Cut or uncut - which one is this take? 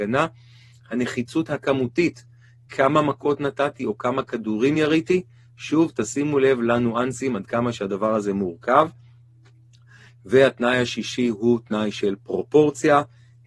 uncut